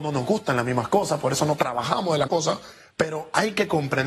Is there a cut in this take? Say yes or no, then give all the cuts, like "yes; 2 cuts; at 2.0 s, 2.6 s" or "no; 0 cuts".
yes; 2 cuts; at 1.6 s, 2.3 s